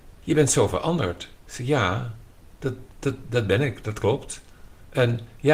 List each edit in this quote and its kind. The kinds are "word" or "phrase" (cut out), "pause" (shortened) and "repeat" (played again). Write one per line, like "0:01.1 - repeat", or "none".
none